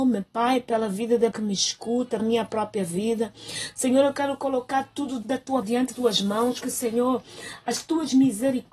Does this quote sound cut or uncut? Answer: cut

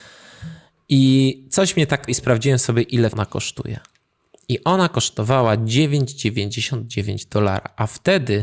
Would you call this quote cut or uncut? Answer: cut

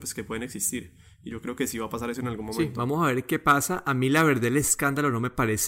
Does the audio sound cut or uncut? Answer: uncut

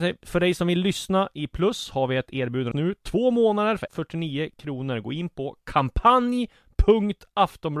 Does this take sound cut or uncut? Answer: cut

